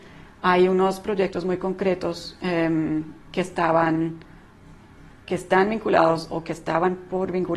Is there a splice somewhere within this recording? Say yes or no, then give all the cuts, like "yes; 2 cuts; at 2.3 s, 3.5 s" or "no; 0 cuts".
no; 0 cuts